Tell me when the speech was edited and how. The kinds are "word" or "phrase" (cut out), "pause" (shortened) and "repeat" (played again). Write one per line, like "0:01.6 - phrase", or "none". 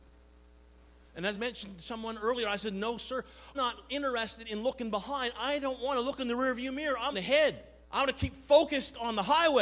0:01.3 - phrase
0:03.5 - word
0:07.1 - word
0:07.8 - pause